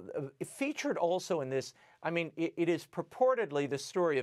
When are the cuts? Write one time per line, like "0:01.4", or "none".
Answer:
none